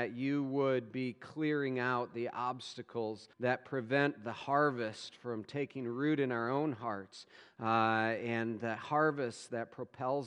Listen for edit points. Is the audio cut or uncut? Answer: cut